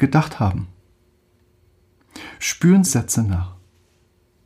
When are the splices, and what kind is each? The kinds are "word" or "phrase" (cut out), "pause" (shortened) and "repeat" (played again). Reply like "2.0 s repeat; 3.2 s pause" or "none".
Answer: 2.9 s phrase